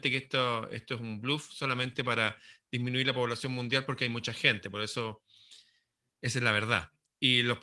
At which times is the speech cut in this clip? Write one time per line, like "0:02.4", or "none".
none

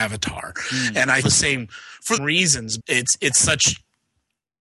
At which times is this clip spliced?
0:01.2
0:02.2
0:02.8

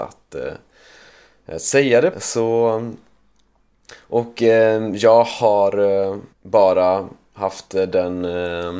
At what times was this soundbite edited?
0:02.1
0:06.3

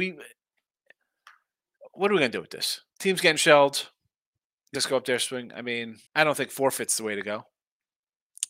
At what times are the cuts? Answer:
0:02.9
0:04.7
0:06.1

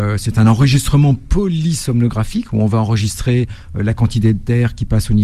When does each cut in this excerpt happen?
none

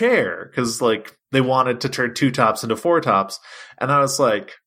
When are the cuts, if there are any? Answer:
none

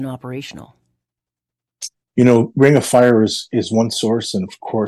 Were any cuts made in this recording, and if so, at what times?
0:02.0

